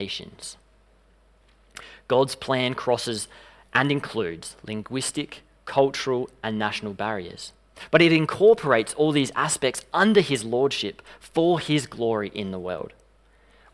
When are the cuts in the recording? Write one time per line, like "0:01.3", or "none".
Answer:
none

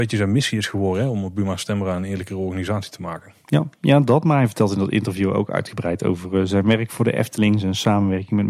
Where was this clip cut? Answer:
none

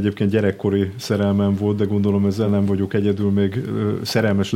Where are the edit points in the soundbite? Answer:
none

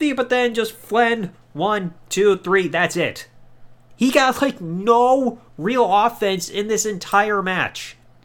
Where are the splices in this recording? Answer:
0:05.5

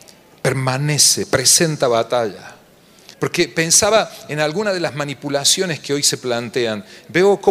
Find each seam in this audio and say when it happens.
0:03.1

